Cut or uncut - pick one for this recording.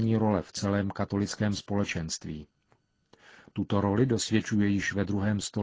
uncut